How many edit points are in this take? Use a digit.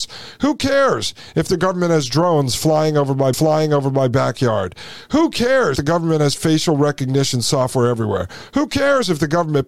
2